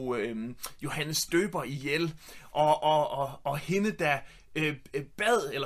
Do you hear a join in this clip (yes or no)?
no